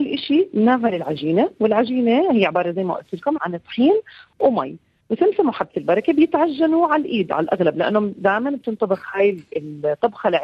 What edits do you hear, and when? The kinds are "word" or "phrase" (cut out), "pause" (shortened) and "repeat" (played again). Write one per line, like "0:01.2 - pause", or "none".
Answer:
0:03.4 - word